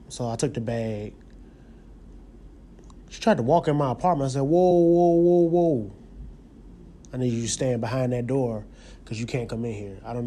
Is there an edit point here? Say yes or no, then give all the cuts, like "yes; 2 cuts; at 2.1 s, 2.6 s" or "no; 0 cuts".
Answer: no; 0 cuts